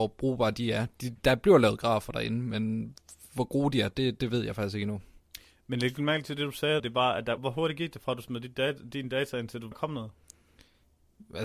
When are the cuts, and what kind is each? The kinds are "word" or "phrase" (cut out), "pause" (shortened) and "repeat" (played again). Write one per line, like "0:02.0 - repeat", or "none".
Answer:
0:04.2 - word
0:06.8 - word
0:07.4 - word
0:09.7 - word